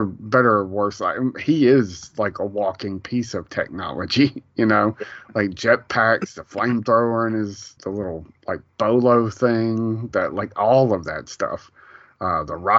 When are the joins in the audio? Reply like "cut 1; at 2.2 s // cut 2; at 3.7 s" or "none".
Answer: cut 1; at 7.8 s